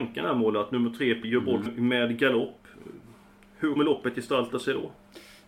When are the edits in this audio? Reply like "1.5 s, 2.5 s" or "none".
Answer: 1.2 s, 1.7 s, 3.8 s